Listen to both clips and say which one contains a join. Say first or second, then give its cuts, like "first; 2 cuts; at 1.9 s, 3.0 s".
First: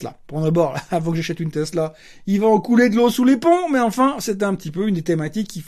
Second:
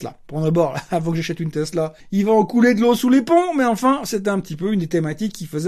second; 1 cut; at 2.0 s